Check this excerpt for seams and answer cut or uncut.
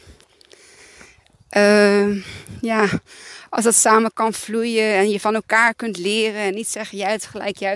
uncut